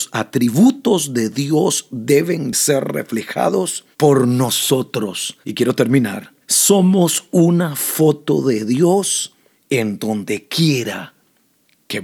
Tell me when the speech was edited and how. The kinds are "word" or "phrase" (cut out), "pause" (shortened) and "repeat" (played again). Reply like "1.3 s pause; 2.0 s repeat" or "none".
3.9 s pause; 5.4 s pause; 6.4 s pause; 9.5 s pause